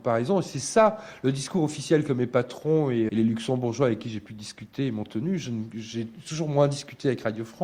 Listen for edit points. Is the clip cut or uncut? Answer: cut